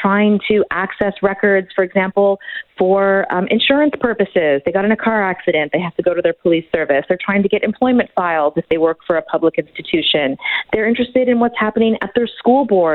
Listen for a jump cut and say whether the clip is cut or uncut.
uncut